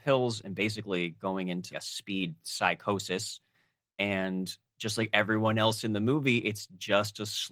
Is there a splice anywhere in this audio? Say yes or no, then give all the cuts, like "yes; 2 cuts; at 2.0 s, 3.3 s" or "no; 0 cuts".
yes; 1 cut; at 1.7 s